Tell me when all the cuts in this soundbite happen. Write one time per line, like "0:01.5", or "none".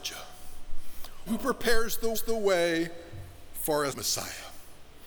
0:01.3
0:02.1
0:03.9